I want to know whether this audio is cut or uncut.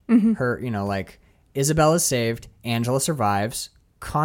uncut